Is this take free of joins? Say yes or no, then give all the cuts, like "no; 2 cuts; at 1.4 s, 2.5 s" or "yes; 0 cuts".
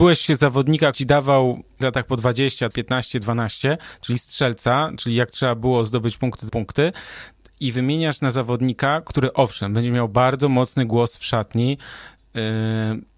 no; 4 cuts; at 0.9 s, 1.8 s, 2.7 s, 6.5 s